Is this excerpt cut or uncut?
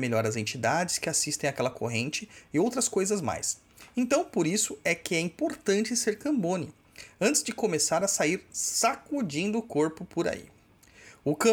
uncut